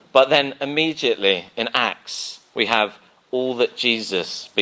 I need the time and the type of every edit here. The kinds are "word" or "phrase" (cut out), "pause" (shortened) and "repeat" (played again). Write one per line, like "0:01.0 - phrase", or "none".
none